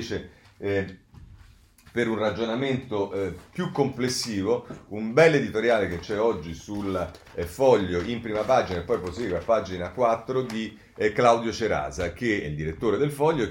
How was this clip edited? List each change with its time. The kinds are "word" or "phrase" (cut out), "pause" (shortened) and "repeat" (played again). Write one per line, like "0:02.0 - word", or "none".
none